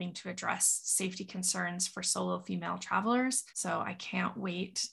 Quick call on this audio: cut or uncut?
cut